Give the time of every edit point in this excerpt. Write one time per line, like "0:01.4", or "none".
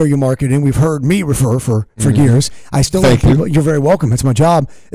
none